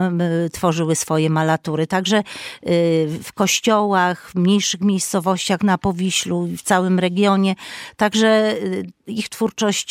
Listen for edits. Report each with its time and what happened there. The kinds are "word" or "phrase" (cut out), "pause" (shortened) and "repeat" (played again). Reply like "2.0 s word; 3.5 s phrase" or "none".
none